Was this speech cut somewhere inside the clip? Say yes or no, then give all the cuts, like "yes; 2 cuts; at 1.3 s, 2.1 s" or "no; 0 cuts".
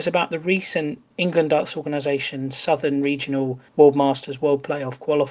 yes; 1 cut; at 3.7 s